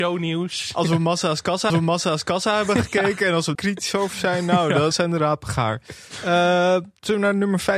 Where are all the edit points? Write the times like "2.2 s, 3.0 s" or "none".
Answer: 1.7 s, 3.5 s, 4.9 s